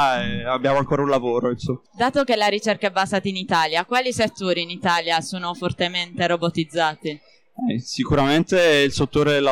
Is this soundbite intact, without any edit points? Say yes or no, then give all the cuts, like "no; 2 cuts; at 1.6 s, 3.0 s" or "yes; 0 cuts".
no; 1 cut; at 1.9 s